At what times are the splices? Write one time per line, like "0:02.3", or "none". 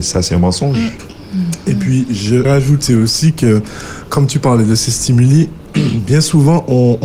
0:02.4
0:04.1